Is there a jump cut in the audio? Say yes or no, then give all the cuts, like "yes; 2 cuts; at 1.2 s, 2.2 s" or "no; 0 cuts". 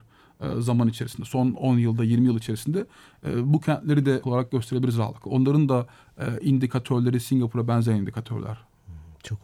yes; 1 cut; at 4.2 s